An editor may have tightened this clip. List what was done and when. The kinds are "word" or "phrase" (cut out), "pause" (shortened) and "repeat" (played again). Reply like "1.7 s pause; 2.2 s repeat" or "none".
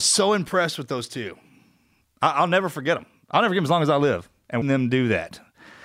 4.6 s word